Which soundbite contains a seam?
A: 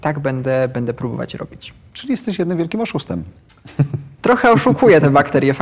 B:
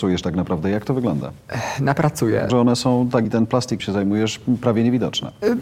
B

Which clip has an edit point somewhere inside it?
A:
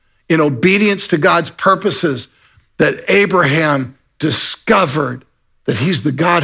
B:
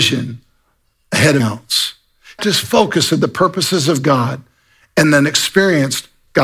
B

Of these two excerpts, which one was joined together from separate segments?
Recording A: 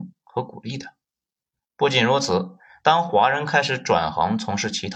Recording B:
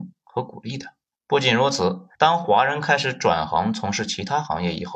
B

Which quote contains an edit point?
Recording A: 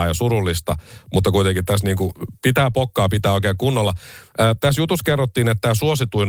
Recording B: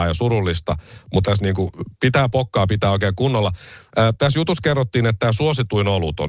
B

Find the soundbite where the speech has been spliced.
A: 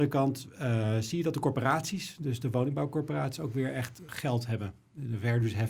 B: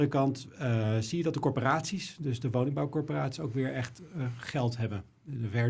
A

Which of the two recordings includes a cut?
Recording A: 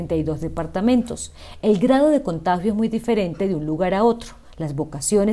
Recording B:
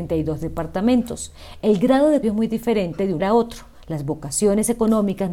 B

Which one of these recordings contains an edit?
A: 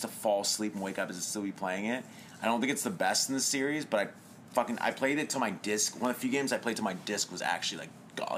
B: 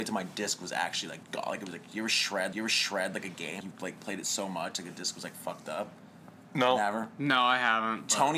B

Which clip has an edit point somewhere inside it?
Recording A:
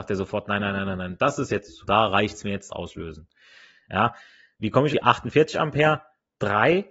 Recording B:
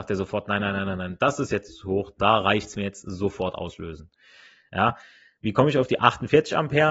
A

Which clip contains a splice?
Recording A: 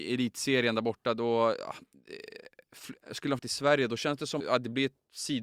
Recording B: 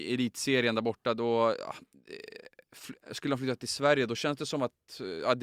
A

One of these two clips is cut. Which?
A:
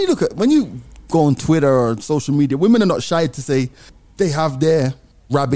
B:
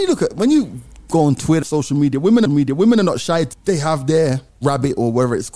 B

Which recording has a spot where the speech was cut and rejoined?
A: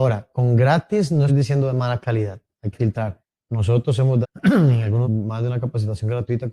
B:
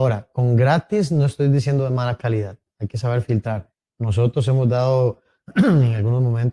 A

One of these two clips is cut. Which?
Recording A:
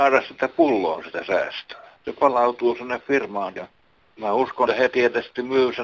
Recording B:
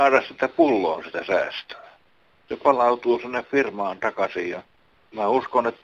A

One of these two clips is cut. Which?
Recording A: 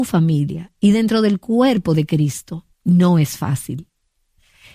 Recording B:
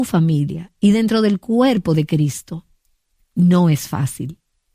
A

